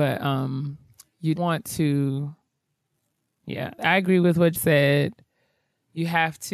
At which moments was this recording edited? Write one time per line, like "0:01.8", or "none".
0:01.4
0:03.8
0:04.5